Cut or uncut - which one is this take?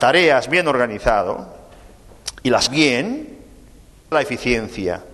cut